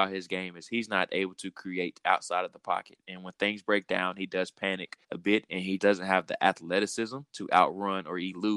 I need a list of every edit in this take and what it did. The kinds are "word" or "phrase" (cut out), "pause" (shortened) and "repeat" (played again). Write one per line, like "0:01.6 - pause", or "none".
0:05.0 - pause
0:05.8 - word
0:07.3 - pause